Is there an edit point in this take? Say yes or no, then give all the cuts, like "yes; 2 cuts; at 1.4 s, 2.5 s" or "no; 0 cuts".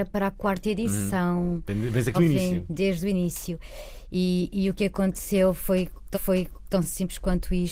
yes; 2 cuts; at 2.1 s, 6.1 s